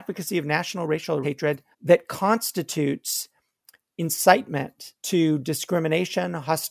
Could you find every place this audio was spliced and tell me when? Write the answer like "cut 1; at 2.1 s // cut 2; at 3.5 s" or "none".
cut 1; at 1.2 s // cut 2; at 1.7 s // cut 3; at 5.0 s